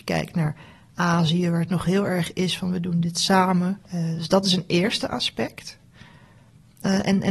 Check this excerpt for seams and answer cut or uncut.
cut